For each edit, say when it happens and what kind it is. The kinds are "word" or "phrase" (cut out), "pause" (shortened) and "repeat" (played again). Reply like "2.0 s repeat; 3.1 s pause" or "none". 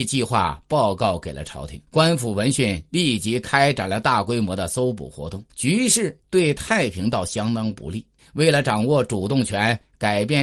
1.9 s pause; 5.5 s pause; 6.2 s pause; 8.2 s pause

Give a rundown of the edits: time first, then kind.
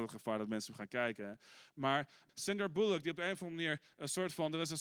2.3 s word

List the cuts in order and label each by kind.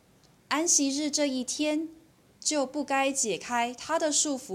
none

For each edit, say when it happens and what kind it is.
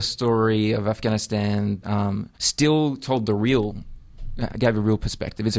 1.8 s word; 2.3 s pause

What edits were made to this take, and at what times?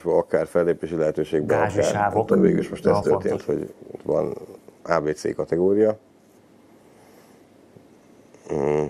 none

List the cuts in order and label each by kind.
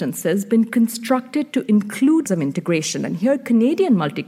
2.3 s phrase

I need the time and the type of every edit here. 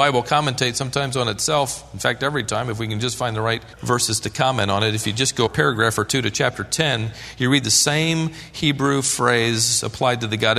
3.7 s pause; 5.5 s word

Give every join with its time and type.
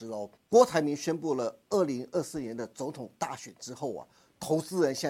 none

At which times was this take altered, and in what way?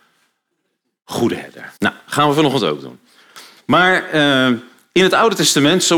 1.8 s pause

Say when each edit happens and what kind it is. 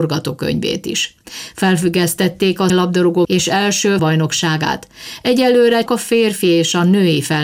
2.7 s word; 3.2 s word; 4.0 s word; 5.9 s word

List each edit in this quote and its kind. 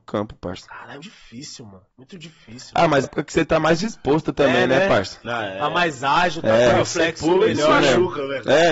1.0 s word; 1.9 s pause; 3.0 s word

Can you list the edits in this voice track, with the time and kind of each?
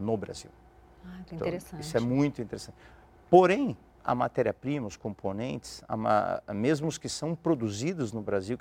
none

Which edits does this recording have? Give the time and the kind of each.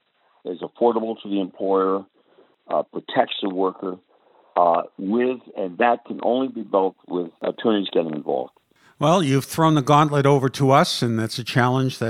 none

